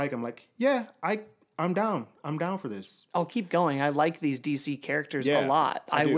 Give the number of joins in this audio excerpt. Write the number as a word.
zero